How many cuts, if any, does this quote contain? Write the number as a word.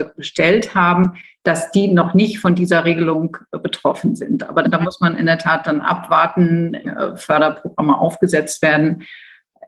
two